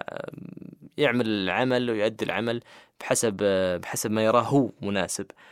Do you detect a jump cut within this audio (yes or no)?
no